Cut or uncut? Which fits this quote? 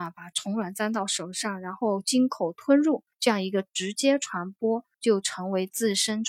cut